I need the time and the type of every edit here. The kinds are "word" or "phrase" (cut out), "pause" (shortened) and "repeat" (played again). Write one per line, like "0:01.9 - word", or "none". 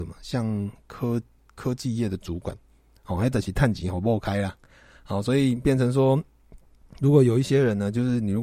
none